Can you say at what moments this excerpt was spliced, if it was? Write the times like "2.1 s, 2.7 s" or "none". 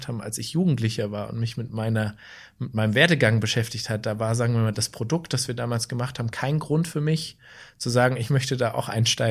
none